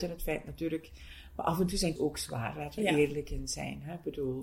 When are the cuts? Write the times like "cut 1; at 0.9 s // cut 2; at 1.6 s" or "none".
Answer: cut 1; at 2.0 s // cut 2; at 2.8 s